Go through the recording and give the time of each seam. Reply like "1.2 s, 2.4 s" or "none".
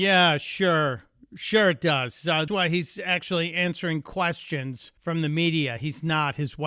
2.5 s, 5.0 s